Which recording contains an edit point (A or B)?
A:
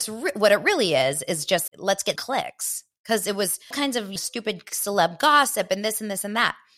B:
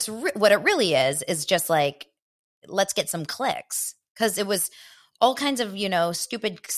A